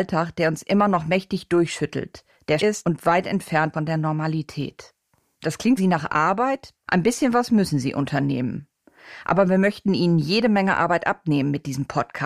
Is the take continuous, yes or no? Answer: no